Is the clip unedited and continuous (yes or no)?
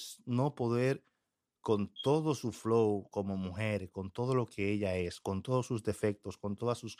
yes